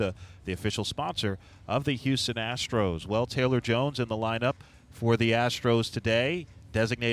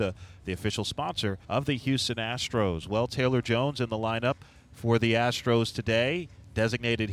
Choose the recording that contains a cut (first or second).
second